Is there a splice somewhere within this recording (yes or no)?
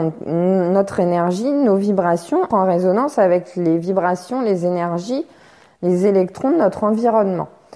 yes